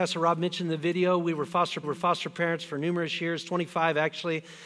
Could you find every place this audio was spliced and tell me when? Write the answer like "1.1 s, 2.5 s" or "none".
1.8 s